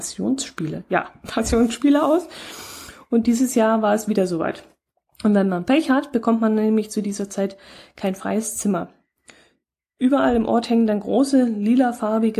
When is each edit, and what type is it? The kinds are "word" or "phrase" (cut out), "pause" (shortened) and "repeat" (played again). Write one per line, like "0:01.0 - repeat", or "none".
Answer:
none

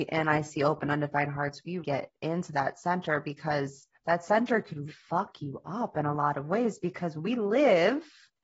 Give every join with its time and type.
0:01.8 - word
0:03.9 - pause
0:04.9 - word

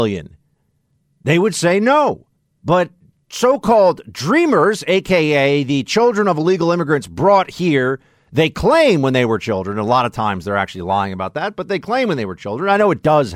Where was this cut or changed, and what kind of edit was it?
0:02.4 - pause

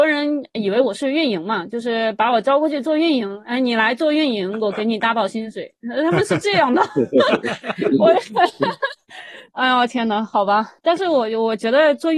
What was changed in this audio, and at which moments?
0:09.5 - pause
0:10.8 - pause

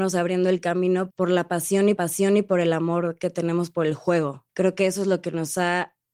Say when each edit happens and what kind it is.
0:01.1 - word
0:02.0 - repeat
0:04.5 - pause

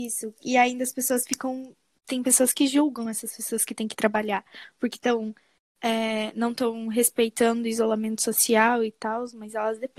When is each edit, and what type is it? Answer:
none

